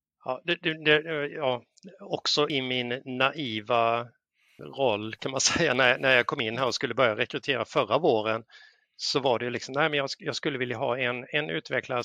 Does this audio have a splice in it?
yes; 2 cuts; at 2.5 s, 4.6 s

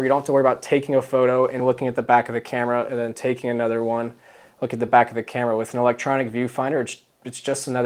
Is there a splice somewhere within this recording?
no; 0 cuts

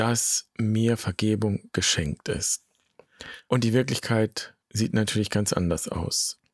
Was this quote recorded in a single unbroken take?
no; 1 cut; at 4.6 s

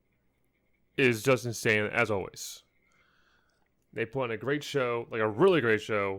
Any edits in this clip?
no; 0 cuts

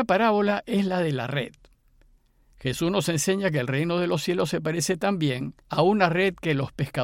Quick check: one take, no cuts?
no; 1 cut; at 5.6 s

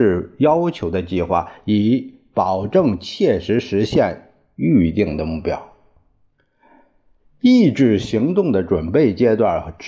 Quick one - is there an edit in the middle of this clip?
no; 0 cuts

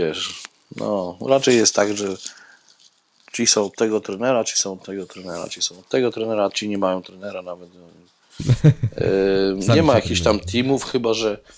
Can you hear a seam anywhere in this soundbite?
no; 0 cuts

